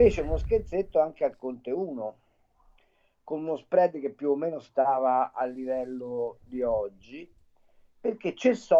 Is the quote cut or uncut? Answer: uncut